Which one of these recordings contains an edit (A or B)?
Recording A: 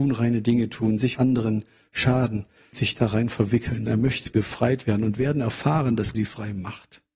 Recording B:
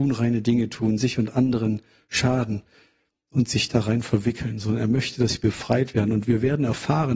A